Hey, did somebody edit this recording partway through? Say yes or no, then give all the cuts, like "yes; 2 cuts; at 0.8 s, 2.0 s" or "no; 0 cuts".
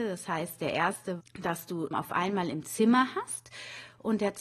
yes; 2 cuts; at 1.2 s, 1.9 s